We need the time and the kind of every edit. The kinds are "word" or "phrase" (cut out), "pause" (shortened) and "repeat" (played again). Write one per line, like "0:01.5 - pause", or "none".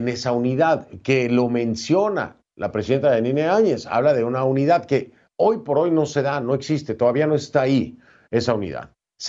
none